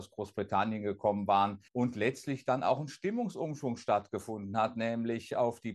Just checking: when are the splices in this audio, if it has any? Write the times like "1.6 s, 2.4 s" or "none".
1.7 s